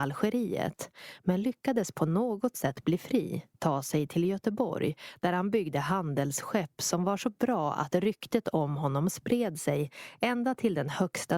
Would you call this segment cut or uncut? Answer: cut